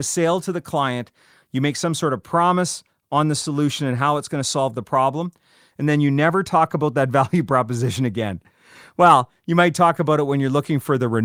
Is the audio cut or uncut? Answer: uncut